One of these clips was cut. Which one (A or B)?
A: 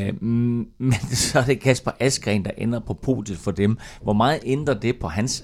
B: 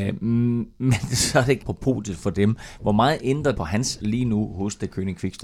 B